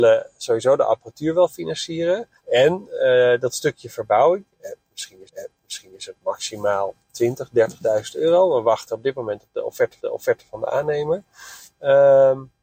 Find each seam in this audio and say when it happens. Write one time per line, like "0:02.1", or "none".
0:02.4
0:05.3
0:10.0